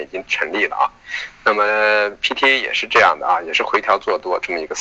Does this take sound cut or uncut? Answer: uncut